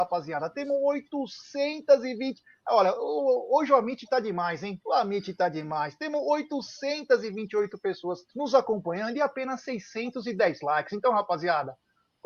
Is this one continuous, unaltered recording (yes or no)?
no